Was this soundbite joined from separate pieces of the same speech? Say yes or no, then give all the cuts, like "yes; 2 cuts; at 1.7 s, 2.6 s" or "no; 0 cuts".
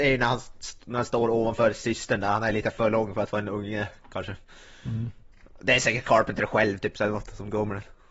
no; 0 cuts